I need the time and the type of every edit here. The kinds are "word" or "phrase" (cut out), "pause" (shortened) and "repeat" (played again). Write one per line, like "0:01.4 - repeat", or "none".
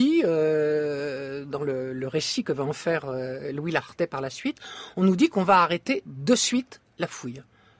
none